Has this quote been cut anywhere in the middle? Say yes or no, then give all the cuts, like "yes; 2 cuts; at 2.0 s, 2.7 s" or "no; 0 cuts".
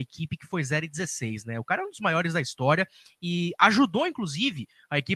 no; 0 cuts